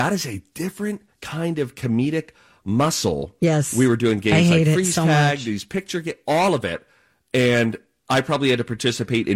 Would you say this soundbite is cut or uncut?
uncut